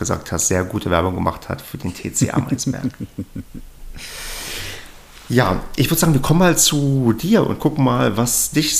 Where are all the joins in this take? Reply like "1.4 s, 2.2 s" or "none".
none